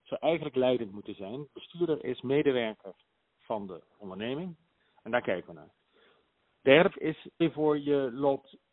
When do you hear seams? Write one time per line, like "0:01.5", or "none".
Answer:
0:06.9
0:07.4

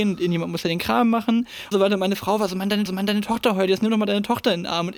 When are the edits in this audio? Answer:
0:01.7
0:02.9

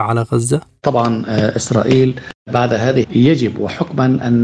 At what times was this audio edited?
0:03.0

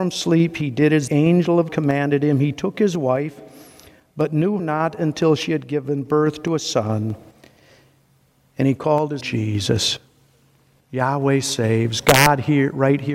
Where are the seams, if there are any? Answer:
0:01.1
0:01.7
0:04.6
0:09.2

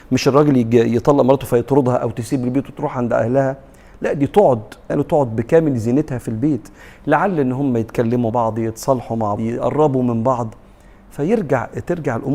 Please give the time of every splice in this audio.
0:04.9
0:08.3
0:09.4

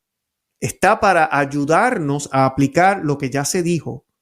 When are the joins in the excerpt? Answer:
none

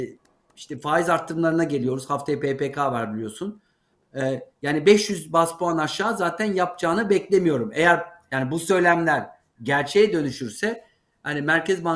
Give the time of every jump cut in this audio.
none

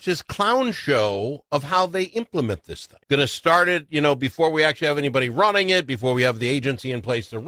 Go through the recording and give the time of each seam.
0:03.0

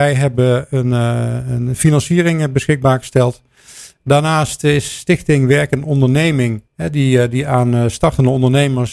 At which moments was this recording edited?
0:06.7

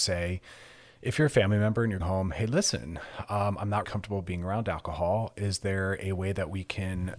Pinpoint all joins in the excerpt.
0:02.0
0:03.8

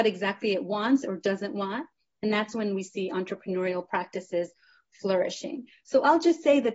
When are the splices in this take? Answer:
none

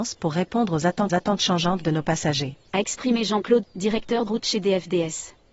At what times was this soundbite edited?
0:01.1
0:02.7
0:03.6
0:04.3

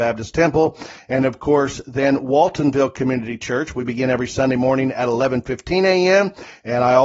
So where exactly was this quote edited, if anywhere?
none

